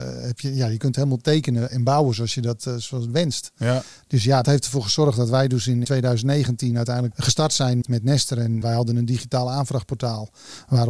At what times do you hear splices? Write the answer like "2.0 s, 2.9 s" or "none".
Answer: 1.7 s, 4.4 s, 5.8 s, 7.1 s, 7.8 s, 8.6 s